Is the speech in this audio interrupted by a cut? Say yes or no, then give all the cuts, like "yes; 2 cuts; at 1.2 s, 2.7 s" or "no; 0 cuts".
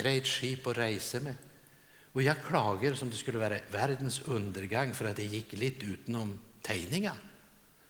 no; 0 cuts